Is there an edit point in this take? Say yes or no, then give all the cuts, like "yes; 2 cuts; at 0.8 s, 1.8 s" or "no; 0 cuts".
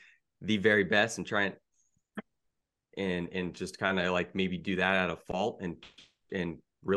no; 0 cuts